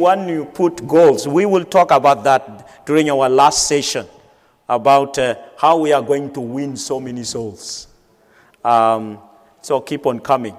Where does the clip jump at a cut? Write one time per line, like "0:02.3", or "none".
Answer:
none